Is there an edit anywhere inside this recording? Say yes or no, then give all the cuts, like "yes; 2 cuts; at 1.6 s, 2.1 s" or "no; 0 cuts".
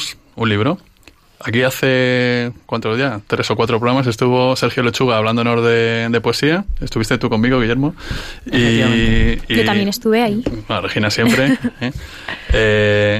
no; 0 cuts